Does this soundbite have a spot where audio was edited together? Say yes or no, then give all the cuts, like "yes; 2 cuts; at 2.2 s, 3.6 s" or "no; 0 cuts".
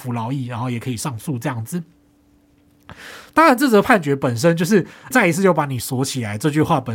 yes; 1 cut; at 5.1 s